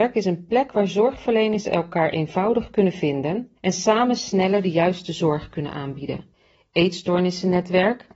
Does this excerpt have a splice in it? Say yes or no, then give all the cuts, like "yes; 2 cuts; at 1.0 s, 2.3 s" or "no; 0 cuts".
yes; 2 cuts; at 3.6 s, 6.3 s